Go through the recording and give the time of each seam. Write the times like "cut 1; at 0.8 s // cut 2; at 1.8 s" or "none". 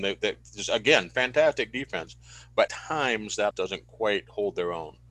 cut 1; at 2.7 s // cut 2; at 3.5 s